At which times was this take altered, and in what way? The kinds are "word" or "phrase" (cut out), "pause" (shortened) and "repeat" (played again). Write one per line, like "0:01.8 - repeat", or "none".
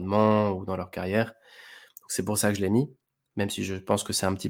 none